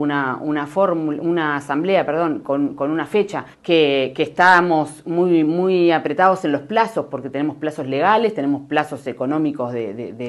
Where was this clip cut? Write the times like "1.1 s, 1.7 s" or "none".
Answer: 3.5 s